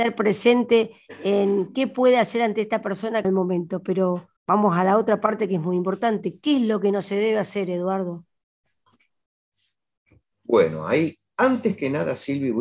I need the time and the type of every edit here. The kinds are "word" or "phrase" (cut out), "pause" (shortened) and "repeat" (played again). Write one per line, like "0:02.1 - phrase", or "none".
0:03.2 - phrase
0:04.4 - pause

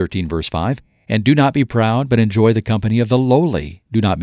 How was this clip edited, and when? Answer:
none

